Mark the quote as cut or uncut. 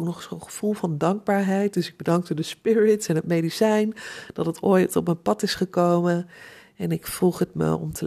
uncut